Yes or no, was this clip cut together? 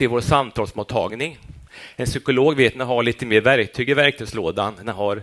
no